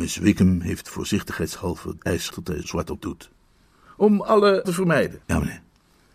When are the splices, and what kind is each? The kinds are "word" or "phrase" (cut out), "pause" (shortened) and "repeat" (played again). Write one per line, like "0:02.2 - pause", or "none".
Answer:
0:02.0 - word
0:02.3 - word
0:02.6 - word
0:03.0 - word
0:04.6 - word
0:05.2 - pause